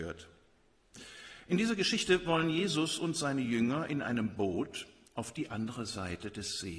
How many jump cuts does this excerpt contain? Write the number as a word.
zero